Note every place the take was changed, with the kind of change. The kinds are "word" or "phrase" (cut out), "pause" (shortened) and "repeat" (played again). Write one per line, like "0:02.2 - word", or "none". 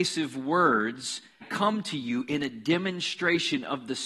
0:01.4 - word

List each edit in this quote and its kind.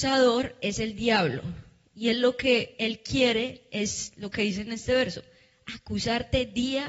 none

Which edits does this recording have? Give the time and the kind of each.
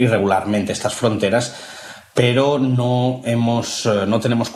none

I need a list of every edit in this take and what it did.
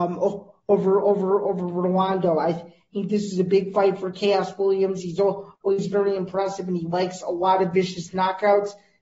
none

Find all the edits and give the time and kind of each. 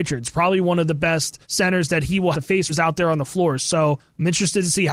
0:01.4 - pause
0:02.3 - word
0:02.7 - phrase

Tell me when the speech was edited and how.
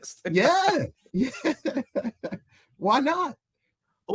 none

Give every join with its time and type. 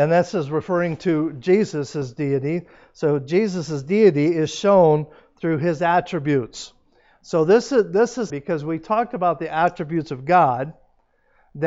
0:08.3 - word

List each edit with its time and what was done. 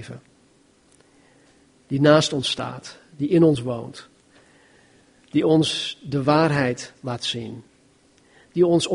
none

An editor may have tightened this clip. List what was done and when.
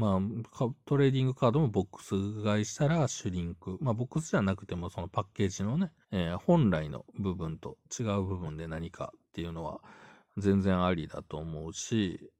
0:06.0 - pause

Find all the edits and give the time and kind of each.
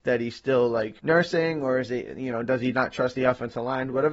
0:01.0 - pause

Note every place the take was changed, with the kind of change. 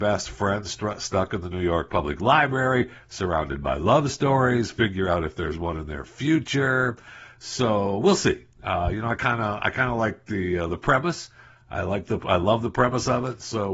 none

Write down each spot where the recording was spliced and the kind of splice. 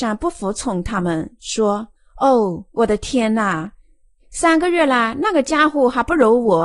0:02.0 - pause

